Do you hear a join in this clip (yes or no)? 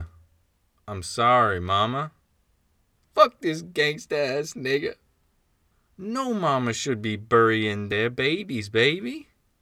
no